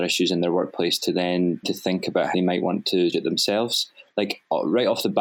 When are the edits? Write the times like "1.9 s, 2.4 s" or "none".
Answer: 1.6 s, 2.3 s, 3.1 s